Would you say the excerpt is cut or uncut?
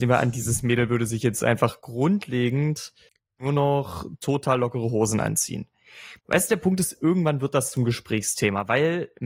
cut